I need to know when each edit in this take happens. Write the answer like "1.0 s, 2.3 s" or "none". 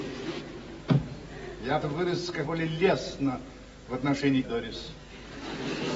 1.8 s, 2.4 s, 4.4 s